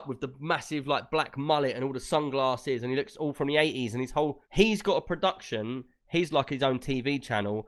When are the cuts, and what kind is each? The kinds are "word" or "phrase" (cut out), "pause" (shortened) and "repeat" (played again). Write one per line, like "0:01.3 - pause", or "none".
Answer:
0:04.4 - pause